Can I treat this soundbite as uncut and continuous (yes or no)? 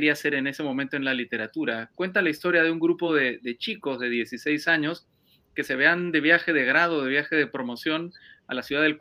yes